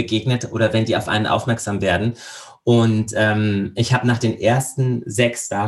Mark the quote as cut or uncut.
uncut